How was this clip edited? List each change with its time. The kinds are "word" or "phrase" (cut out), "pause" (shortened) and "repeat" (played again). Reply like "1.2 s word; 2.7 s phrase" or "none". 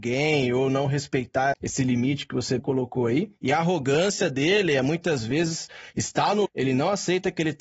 1.5 s word; 2.6 s word; 6.5 s word